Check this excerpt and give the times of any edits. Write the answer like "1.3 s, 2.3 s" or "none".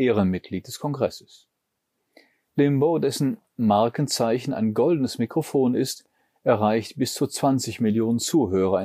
none